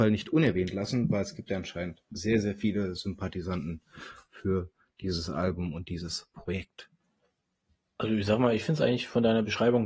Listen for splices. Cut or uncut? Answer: uncut